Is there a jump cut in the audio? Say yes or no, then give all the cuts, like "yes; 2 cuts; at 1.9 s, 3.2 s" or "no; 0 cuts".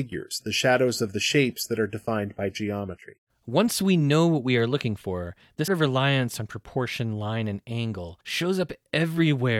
yes; 3 cuts; at 3.3 s, 5.7 s, 8.2 s